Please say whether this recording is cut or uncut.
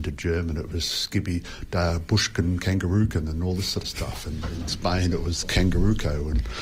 cut